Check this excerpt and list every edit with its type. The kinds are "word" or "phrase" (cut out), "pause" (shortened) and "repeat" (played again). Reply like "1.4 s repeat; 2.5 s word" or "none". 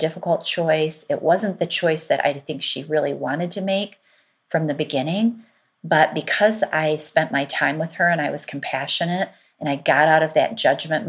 none